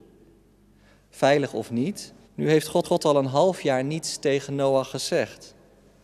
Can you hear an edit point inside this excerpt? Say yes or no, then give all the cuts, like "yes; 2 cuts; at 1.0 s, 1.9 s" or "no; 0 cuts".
yes; 2 cuts; at 2.2 s, 2.8 s